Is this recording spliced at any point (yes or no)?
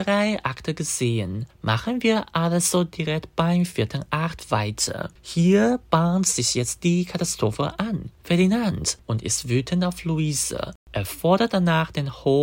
yes